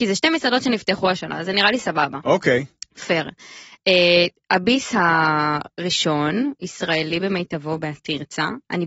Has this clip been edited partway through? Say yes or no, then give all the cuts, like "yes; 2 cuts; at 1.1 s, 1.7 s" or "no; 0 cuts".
no; 0 cuts